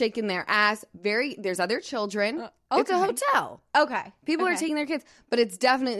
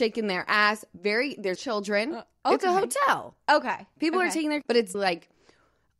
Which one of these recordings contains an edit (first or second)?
second